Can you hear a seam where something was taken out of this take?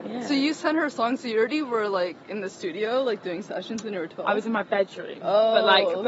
no; 0 cuts

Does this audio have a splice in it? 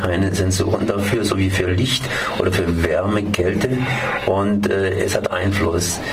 no; 0 cuts

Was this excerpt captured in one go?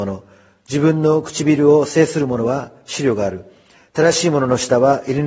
yes; 0 cuts

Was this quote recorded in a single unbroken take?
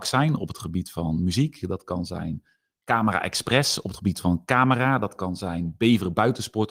yes; 0 cuts

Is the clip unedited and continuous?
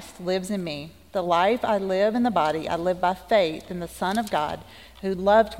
yes; 0 cuts

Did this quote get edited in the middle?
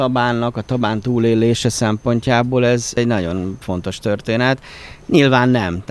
no; 0 cuts

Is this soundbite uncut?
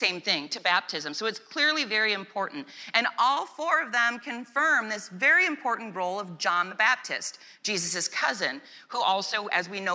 yes; 0 cuts

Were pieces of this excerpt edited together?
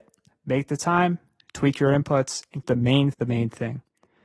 yes; 2 cuts; at 2.6 s, 3.1 s

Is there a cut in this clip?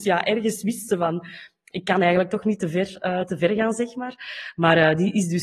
no; 0 cuts

